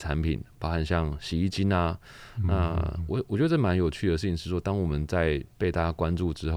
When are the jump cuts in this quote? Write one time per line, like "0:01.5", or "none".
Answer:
0:05.5